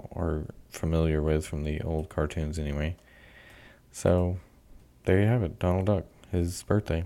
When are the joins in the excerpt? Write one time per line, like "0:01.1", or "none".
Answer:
none